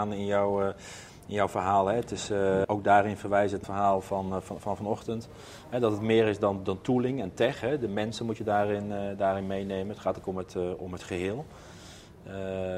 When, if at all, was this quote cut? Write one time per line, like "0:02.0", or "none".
0:02.6
0:03.6
0:10.2